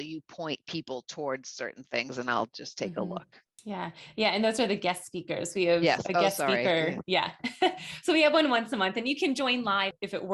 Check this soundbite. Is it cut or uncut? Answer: uncut